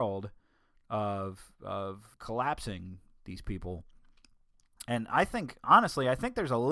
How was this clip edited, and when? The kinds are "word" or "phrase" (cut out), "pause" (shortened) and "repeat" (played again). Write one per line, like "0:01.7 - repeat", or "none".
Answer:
0:02.1 - pause

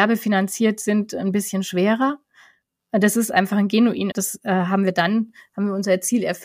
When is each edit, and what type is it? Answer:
0:04.1 - phrase

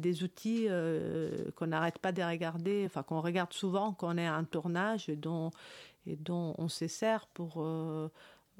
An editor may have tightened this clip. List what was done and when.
none

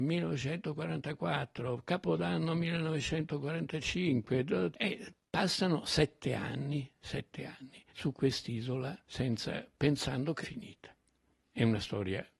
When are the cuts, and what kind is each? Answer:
0:04.7 - word
0:07.9 - pause
0:09.0 - pause
0:10.4 - phrase

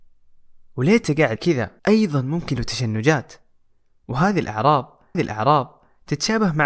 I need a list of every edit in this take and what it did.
0:01.4 - word
0:01.8 - pause
0:02.6 - phrase
0:05.1 - repeat

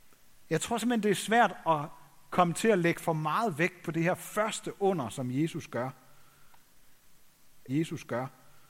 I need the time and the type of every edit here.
0:07.7 - repeat

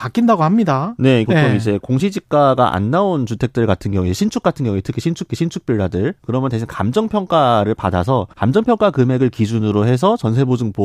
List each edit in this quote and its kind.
0:01.2 - phrase
0:05.3 - repeat
0:08.3 - pause

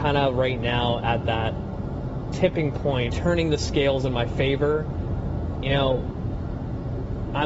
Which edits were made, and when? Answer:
0:03.1 - phrase
0:05.6 - word

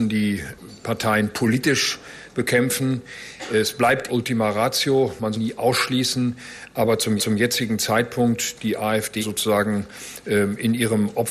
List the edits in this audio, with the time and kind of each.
0:04.1 - phrase
0:05.3 - phrase
0:07.2 - repeat
0:09.2 - word

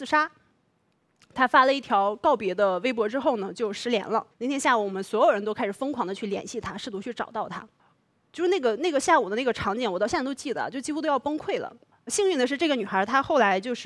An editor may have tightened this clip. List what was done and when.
0:04.3 - pause
0:07.8 - pause

